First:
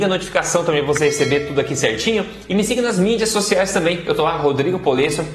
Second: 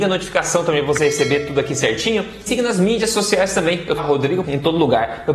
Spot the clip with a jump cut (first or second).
second